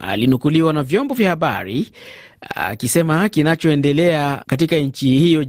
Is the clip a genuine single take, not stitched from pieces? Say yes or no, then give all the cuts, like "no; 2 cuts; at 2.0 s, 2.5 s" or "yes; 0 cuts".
yes; 0 cuts